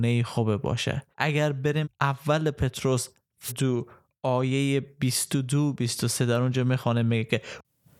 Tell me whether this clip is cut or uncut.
cut